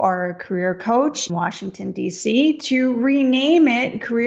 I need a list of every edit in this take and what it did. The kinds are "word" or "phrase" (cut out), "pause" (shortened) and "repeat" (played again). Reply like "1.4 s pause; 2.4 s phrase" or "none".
1.3 s word